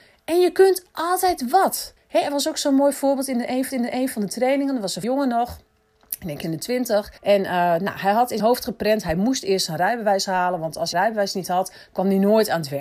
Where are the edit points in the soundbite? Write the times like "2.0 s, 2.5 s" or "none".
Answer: 2.0 s, 3.7 s, 5.0 s, 6.4 s, 7.2 s, 8.4 s, 10.9 s